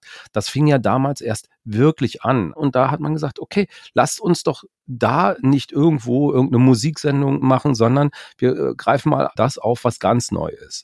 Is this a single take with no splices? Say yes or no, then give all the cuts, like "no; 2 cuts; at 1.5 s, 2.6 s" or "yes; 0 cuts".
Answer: yes; 0 cuts